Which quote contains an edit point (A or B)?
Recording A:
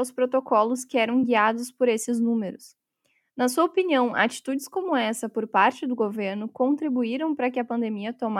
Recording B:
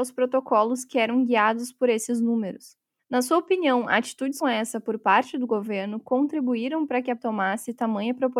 B